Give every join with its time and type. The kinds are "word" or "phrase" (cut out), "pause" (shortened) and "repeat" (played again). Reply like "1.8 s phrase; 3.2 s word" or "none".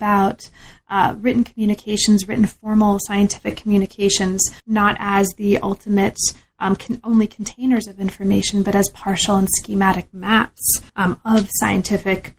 4.6 s pause; 10.9 s pause